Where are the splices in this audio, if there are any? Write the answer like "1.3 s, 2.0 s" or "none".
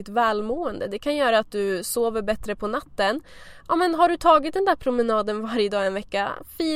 none